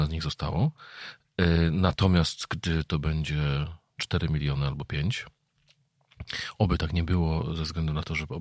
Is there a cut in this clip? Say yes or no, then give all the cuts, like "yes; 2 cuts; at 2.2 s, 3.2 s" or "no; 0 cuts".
no; 0 cuts